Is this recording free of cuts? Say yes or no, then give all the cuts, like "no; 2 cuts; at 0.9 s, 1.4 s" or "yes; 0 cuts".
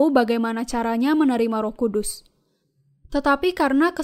yes; 0 cuts